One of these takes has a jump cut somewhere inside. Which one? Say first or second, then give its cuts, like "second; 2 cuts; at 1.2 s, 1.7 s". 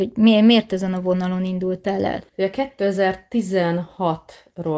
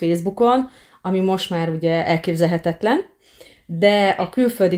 first; 1 cut; at 2.3 s